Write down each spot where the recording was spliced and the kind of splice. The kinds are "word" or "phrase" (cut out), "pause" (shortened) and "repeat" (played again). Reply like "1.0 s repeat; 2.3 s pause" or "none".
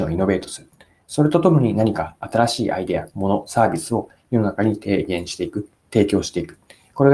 5.8 s pause